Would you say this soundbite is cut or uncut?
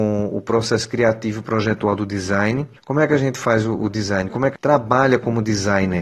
cut